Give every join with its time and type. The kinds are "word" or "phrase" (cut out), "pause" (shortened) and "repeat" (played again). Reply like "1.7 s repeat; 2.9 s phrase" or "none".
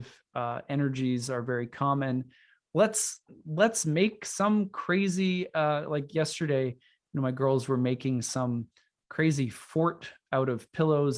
none